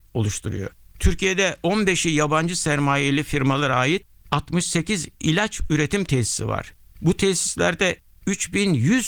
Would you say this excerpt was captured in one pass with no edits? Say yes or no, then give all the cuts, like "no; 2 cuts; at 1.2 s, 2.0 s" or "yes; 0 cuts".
yes; 0 cuts